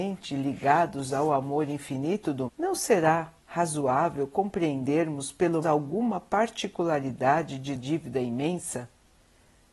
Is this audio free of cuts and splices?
no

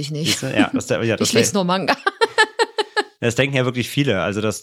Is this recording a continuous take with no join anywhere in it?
yes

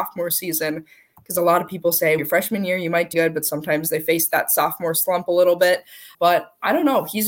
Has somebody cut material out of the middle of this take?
yes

